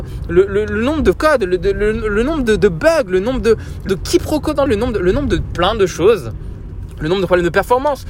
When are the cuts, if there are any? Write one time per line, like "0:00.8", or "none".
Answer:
0:01.1
0:03.9
0:04.7